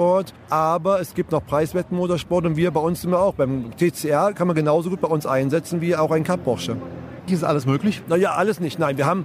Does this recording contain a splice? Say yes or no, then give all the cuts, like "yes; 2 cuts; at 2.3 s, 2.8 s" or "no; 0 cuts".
yes; 1 cut; at 7.3 s